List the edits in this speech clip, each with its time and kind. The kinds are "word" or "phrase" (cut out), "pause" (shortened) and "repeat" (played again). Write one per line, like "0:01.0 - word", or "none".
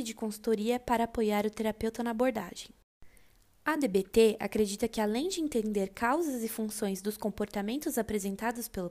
none